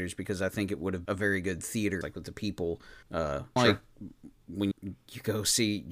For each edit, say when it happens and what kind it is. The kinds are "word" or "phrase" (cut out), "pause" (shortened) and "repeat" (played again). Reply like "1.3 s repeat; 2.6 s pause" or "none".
1.0 s word; 2.0 s word; 3.0 s pause; 3.6 s word; 4.7 s word